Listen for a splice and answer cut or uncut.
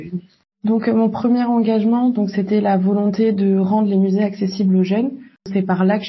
uncut